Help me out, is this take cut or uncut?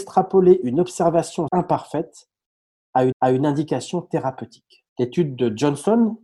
cut